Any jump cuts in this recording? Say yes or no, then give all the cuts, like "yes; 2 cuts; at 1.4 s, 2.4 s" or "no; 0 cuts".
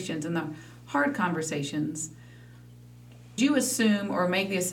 yes; 1 cut; at 3.4 s